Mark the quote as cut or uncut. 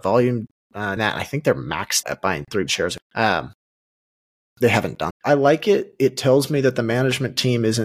cut